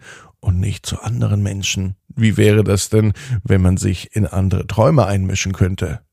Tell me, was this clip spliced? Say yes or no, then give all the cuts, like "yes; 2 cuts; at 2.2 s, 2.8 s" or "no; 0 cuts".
yes; 1 cut; at 2.0 s